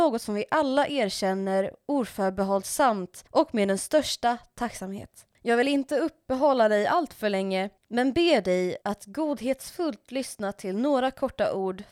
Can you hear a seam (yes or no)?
yes